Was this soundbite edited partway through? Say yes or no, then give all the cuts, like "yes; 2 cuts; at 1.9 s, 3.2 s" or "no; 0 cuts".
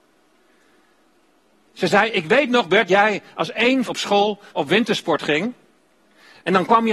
yes; 3 cuts; at 2.9 s, 3.9 s, 4.5 s